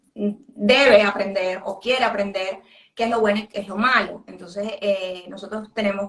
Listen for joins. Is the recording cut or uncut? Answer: uncut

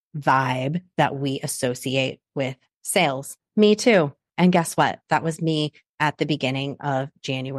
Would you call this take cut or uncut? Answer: uncut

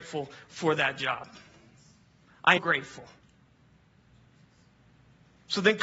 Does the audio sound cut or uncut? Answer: cut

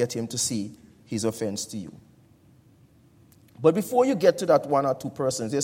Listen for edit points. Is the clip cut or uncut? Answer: uncut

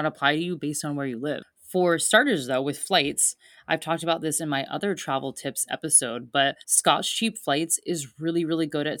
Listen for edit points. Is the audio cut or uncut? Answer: cut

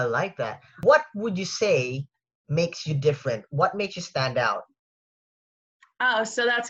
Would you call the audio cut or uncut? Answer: uncut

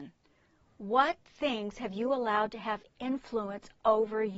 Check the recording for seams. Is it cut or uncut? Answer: uncut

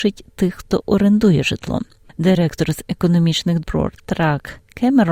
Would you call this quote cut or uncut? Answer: cut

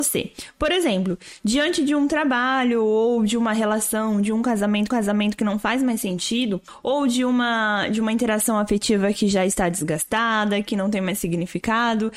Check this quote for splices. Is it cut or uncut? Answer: cut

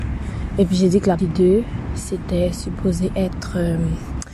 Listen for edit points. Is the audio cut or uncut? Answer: cut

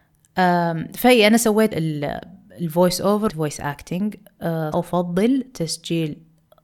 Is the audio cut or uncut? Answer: cut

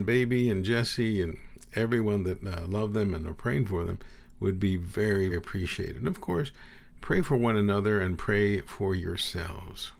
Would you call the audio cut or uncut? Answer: cut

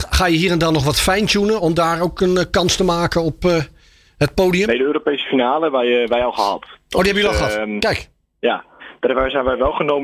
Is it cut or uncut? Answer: uncut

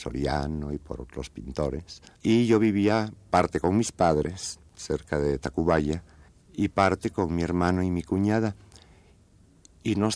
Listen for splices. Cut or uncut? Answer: cut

